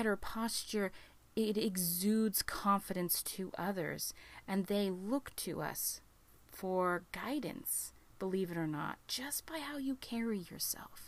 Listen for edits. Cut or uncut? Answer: uncut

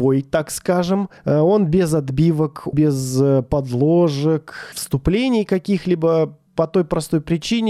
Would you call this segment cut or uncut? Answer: cut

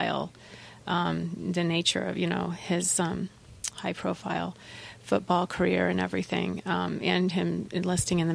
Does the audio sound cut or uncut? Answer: uncut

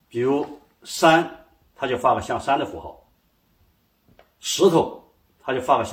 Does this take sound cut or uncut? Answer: uncut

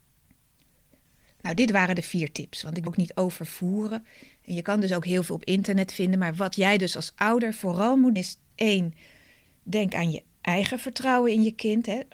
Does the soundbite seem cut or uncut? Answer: cut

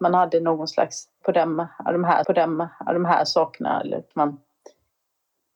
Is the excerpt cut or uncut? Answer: cut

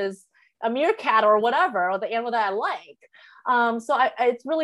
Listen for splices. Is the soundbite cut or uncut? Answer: uncut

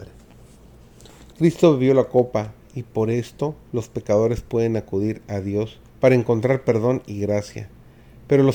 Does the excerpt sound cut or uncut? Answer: cut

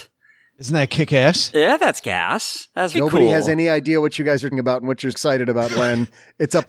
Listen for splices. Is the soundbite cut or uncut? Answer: cut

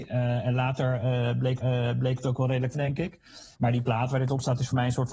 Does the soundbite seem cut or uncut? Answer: cut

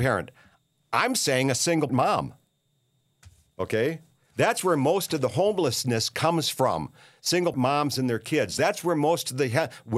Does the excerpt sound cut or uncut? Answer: cut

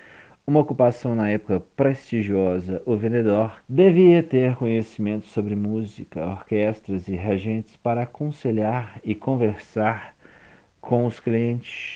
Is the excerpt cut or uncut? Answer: cut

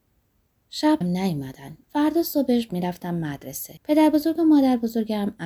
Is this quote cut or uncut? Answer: cut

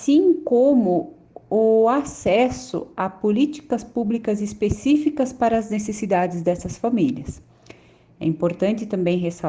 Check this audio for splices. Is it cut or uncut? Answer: uncut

